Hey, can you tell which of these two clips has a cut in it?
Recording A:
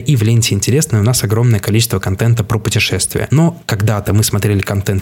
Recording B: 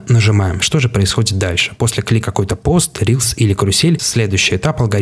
B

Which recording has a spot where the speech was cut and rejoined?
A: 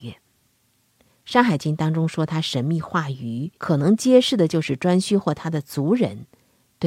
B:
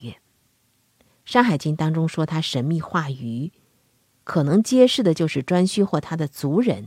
A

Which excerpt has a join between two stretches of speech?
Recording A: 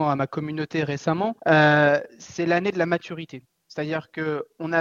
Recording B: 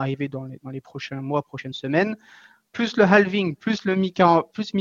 A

